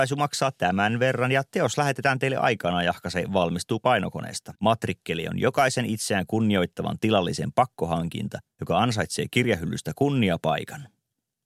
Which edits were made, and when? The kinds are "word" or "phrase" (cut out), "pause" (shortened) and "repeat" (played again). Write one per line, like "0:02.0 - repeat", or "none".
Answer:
0:04.5 - pause